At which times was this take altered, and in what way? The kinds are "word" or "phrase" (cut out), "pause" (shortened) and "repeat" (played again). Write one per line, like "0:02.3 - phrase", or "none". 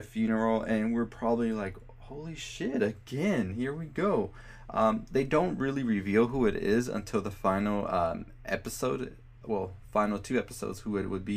none